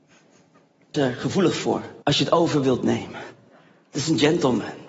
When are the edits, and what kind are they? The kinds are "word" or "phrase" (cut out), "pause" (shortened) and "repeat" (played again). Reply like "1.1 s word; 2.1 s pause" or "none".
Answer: 0.9 s phrase; 2.0 s pause